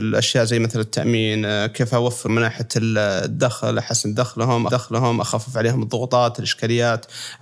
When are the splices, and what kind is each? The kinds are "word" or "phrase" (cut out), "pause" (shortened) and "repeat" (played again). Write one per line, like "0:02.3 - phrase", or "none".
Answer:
0:02.3 - word
0:04.7 - repeat

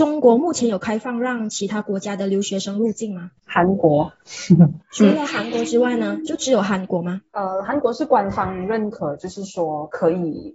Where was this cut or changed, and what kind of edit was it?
0:07.3 - pause

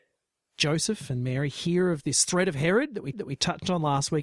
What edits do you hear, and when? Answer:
0:03.1 - repeat

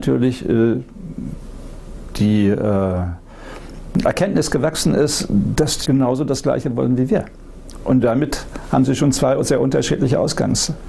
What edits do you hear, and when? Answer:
0:05.8 - phrase

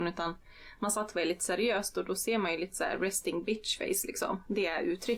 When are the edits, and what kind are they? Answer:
none

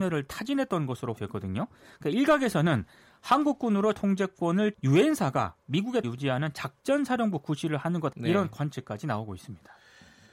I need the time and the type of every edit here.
0:01.2 - word
0:03.9 - word
0:04.7 - phrase
0:06.0 - word
0:08.1 - word

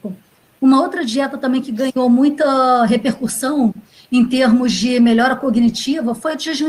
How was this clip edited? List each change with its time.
none

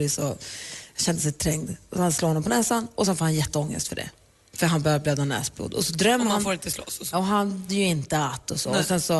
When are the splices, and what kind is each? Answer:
0:07.1 - word
0:07.7 - word

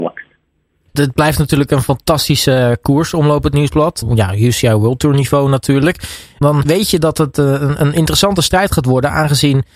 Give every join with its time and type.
none

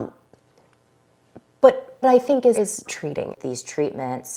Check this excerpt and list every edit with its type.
0:02.0 - word
0:02.5 - word
0:02.8 - word
0:03.3 - word

